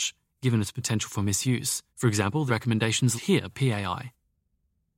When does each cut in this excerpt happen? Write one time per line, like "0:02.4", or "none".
0:01.9
0:02.5
0:03.2
0:03.5